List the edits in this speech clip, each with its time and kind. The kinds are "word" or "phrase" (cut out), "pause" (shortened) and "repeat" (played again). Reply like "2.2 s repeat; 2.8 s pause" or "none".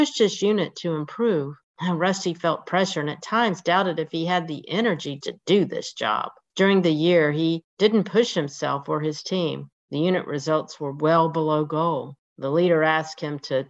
5.2 s word